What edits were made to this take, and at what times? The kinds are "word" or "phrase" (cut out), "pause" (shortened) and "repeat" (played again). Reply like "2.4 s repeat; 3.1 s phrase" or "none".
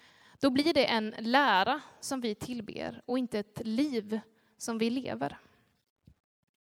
none

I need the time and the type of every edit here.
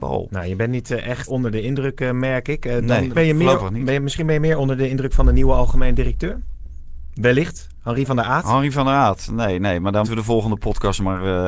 1.3 s word; 3.1 s word; 10.0 s word

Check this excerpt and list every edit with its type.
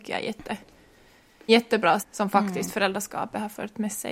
1.5 s word; 2.0 s word

